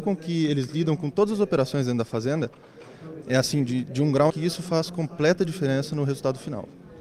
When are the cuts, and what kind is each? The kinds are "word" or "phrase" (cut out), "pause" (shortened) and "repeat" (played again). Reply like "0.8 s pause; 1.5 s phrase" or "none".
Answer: 3.2 s word; 4.3 s phrase